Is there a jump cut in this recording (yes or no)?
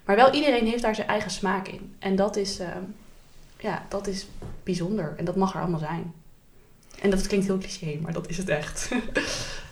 no